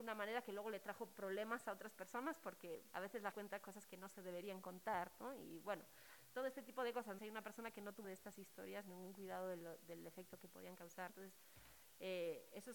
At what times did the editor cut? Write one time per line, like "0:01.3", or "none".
0:02.9
0:03.3
0:07.2
0:08.0
0:11.1